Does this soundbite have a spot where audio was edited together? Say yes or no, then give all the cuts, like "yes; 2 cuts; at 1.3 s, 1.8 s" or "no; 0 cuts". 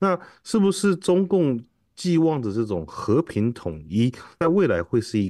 no; 0 cuts